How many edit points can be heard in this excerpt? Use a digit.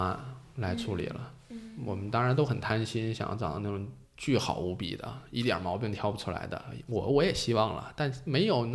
1